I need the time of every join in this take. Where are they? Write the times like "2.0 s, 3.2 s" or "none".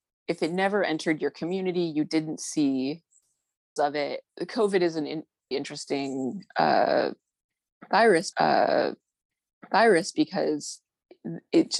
3.8 s, 4.3 s, 5.5 s, 8.3 s

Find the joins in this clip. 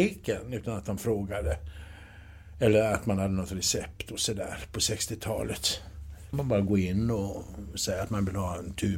6.3 s

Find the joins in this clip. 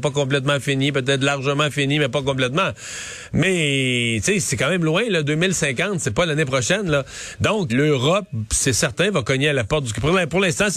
7.7 s

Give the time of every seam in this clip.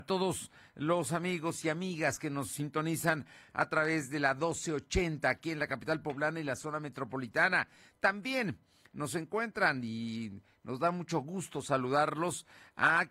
none

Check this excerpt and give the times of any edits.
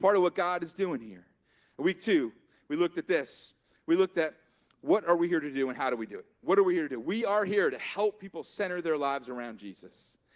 none

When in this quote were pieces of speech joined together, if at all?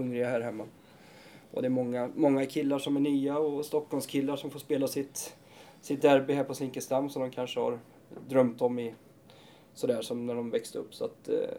none

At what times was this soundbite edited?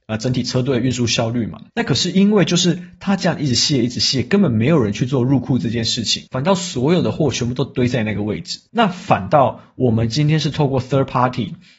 1.7 s, 6.3 s, 8.7 s

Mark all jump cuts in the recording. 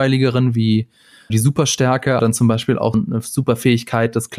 1.3 s, 2.2 s, 2.9 s

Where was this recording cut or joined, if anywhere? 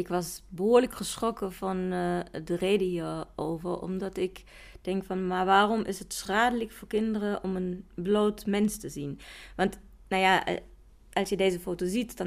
none

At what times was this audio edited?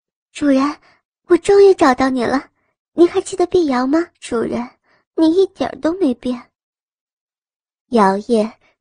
4.1 s

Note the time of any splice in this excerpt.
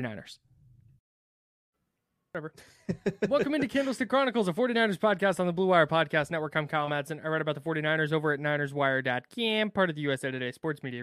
none

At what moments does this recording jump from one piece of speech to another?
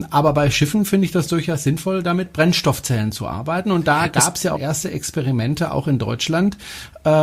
4.5 s

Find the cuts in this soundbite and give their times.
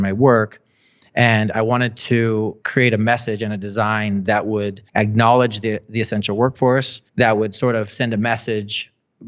2.6 s, 4.9 s, 7.1 s

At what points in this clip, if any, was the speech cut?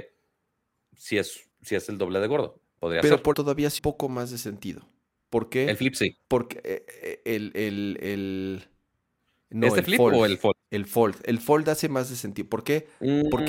1.5 s, 2.7 s, 3.3 s, 3.8 s, 5.2 s, 6.2 s

